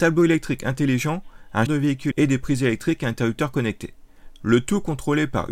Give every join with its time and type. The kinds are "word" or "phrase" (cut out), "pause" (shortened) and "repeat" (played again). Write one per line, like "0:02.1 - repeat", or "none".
0:01.7 - word
0:02.1 - word